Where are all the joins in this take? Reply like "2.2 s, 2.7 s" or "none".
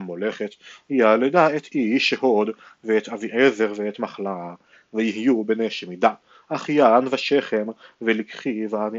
none